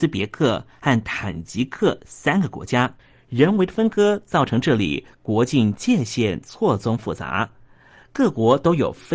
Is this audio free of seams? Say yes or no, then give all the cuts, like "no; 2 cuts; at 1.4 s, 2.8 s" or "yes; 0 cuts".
yes; 0 cuts